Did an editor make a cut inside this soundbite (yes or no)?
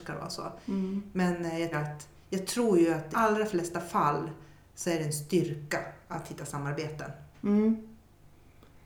yes